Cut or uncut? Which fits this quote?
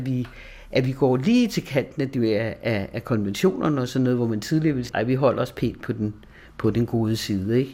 cut